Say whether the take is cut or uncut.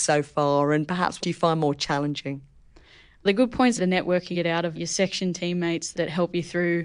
cut